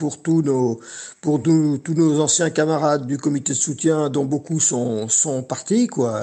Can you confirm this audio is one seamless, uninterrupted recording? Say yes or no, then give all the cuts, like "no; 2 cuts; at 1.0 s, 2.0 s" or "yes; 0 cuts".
yes; 0 cuts